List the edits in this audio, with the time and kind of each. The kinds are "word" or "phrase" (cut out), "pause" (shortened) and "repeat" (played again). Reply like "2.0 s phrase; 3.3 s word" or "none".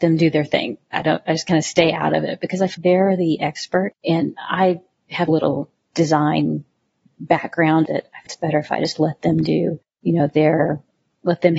2.7 s word; 4.0 s pause; 5.3 s word; 7.9 s phrase; 8.3 s word; 9.9 s pause